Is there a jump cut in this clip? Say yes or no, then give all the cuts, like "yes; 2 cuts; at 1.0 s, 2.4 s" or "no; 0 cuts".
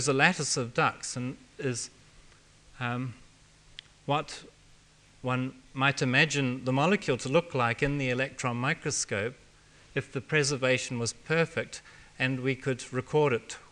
no; 0 cuts